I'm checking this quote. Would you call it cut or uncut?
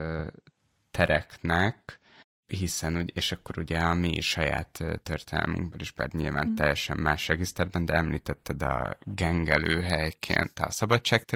cut